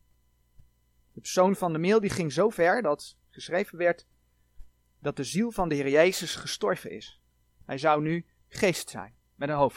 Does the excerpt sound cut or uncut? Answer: uncut